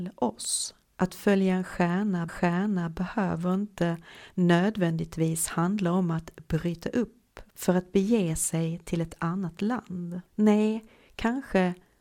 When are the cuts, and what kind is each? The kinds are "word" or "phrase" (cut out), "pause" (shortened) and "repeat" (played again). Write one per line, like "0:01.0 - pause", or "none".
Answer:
0:00.9 - pause
0:02.3 - repeat
0:10.3 - pause